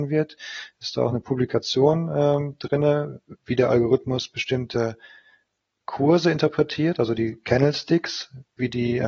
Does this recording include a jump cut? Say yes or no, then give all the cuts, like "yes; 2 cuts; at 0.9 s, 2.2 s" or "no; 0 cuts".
no; 0 cuts